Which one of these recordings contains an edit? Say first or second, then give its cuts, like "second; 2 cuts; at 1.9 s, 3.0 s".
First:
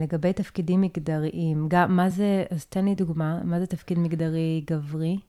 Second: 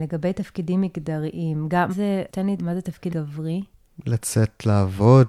second; 4 cuts; at 1.9 s, 2.3 s, 2.6 s, 3.1 s